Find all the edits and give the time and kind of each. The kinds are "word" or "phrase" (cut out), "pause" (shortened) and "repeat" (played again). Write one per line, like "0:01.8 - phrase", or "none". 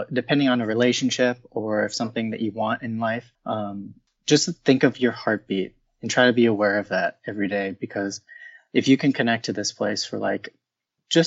0:03.3 - pause

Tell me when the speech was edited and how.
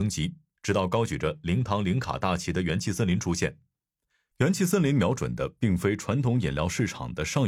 none

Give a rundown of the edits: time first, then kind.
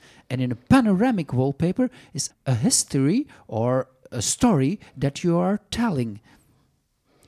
0:02.3 - word
0:04.0 - word

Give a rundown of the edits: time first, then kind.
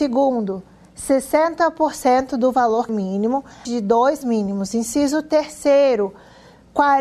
0:02.9 - phrase
0:03.6 - phrase
0:04.2 - word

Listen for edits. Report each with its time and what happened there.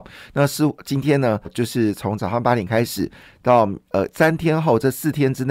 0:01.4 - word

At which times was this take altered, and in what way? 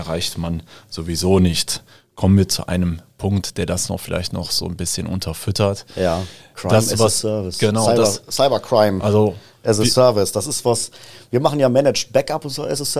none

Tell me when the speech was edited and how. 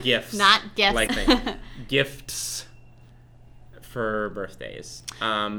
0:01.1 - phrase

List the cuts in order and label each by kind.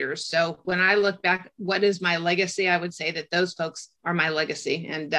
0:04.0 - pause

